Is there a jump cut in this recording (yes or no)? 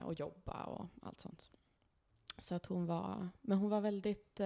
no